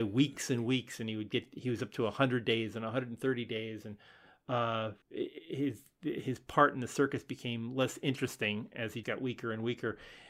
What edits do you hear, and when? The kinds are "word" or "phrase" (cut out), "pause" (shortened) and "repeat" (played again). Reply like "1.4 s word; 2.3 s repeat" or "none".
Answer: 5.0 s pause; 9.0 s word

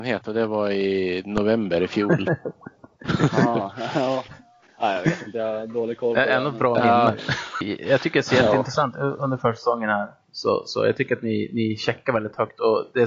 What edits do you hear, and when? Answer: none

